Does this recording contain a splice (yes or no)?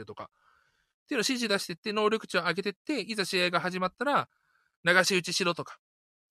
no